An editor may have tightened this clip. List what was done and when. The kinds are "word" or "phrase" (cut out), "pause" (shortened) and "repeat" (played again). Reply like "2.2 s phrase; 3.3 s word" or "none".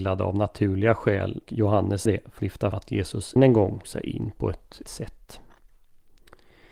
1.4 s word; 2.1 s word; 2.4 s word; 2.7 s word; 3.4 s word; 3.8 s word; 4.8 s word